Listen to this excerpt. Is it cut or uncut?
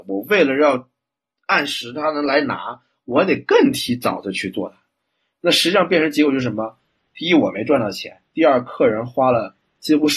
cut